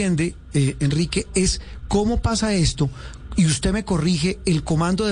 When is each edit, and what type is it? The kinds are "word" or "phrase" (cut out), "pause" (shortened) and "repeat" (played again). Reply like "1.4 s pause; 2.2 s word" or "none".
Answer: none